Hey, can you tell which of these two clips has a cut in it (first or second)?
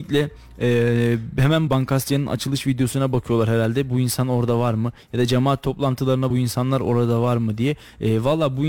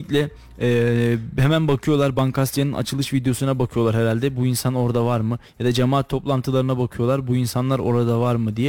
first